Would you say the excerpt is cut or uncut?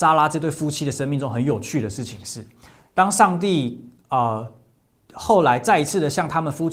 uncut